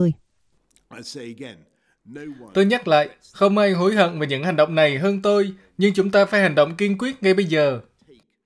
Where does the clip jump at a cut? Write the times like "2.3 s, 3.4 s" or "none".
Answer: none